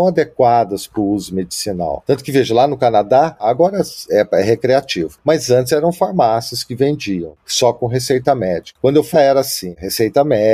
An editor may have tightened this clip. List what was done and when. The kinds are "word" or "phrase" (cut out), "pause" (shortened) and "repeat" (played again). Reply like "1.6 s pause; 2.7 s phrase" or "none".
9.1 s phrase